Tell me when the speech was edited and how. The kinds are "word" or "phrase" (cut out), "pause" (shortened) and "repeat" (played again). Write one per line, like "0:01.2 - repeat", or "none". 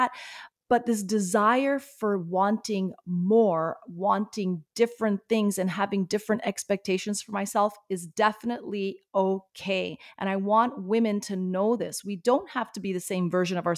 none